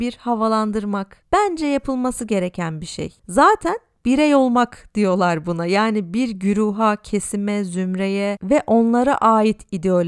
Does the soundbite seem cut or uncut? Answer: uncut